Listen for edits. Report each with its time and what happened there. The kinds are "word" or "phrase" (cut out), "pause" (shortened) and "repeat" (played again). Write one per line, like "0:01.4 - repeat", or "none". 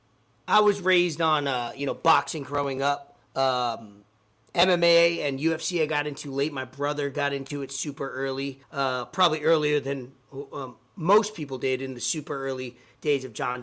0:03.2 - pause
0:08.6 - pause